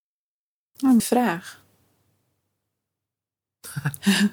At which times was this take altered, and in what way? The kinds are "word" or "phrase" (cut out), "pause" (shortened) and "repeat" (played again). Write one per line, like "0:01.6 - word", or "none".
0:01.0 - word